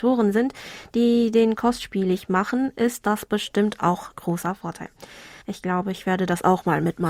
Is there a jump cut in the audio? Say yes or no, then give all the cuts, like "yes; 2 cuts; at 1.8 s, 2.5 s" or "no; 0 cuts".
yes; 3 cuts; at 1.6 s, 4.1 s, 5.4 s